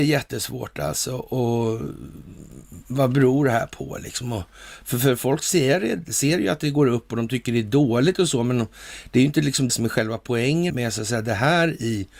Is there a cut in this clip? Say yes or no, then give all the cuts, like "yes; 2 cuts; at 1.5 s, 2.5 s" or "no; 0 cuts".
yes; 2 cuts; at 9.7 s, 10.7 s